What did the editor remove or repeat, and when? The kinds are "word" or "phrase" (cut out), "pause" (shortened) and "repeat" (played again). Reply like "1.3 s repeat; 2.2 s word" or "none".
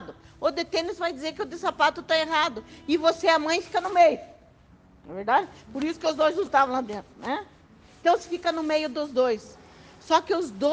none